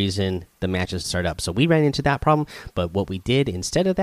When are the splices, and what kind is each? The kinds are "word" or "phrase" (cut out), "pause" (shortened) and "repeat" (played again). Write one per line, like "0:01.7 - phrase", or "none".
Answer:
0:01.0 - word